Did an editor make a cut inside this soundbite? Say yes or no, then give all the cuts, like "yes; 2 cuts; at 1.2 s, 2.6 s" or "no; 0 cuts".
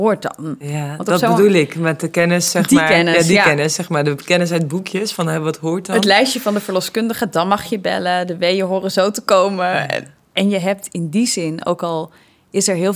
no; 0 cuts